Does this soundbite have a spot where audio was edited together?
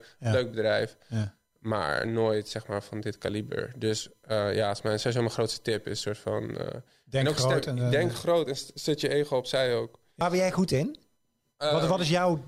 no; 0 cuts

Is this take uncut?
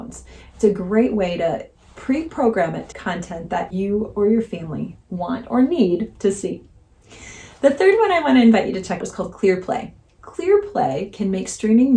no; 3 cuts; at 2.9 s, 3.7 s, 9.0 s

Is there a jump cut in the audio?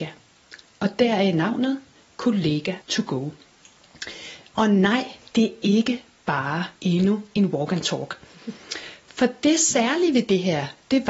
yes; 2 cuts; at 2.8 s, 6.8 s

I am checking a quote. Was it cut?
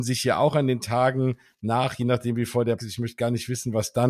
yes; 1 cut; at 2.8 s

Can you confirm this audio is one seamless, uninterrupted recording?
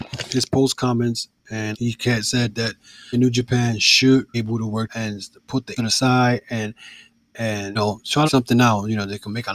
no; 7 cuts; at 1.7 s, 3.1 s, 4.3 s, 4.9 s, 5.8 s, 7.8 s, 8.3 s

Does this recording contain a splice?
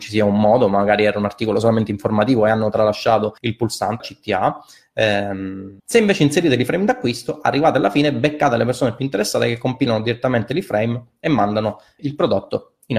yes; 4 cuts; at 3.4 s, 4.0 s, 5.8 s, 12.0 s

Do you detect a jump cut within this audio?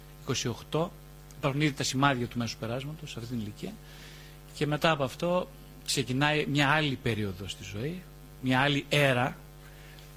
no; 0 cuts

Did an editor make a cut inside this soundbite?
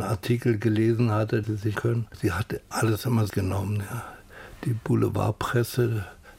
yes; 4 cuts; at 1.4 s, 1.7 s, 2.7 s, 3.3 s

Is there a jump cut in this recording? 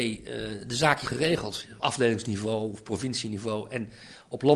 yes; 2 cuts; at 1.0 s, 1.8 s

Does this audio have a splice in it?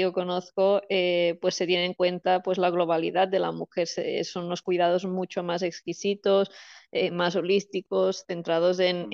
no; 0 cuts

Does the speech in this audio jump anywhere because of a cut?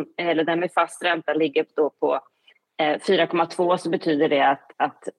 no; 0 cuts

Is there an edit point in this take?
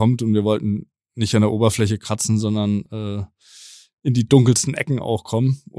no; 0 cuts

